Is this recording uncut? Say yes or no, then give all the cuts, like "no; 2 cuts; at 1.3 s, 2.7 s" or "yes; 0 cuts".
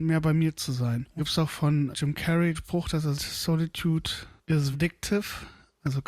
no; 5 cuts; at 1.2 s, 1.9 s, 2.5 s, 3.1 s, 4.7 s